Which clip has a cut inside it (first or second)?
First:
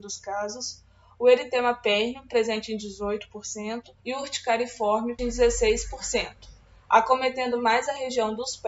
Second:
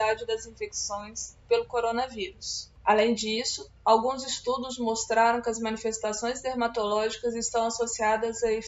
first